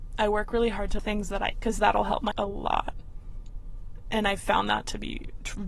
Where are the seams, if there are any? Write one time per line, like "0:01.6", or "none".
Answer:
0:01.0
0:01.5
0:02.3